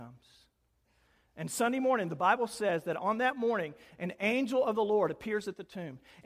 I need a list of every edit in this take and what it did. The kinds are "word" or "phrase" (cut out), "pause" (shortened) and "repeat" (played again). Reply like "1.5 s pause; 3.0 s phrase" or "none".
none